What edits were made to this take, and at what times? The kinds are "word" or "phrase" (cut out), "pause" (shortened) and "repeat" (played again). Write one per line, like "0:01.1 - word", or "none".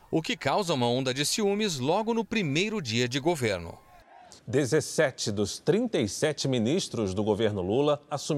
0:04.4 - pause